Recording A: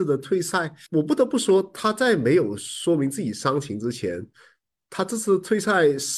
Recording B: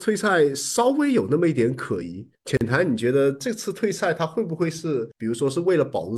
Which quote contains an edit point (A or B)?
B